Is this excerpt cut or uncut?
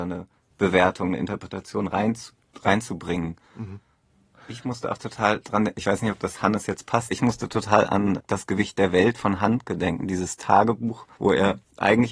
cut